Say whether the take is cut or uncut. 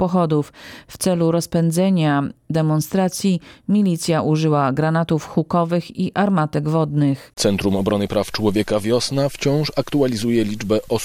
uncut